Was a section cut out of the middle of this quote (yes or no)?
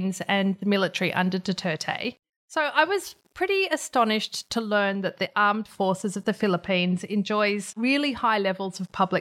yes